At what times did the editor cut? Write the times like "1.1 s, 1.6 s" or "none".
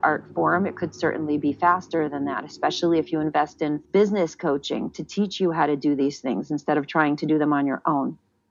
3.8 s